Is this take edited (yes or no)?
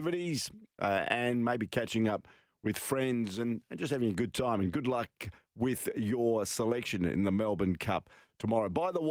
no